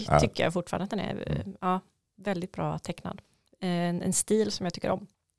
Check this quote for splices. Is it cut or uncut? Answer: uncut